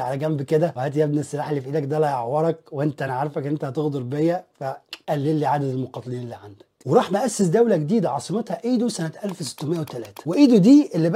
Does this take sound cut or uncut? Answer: uncut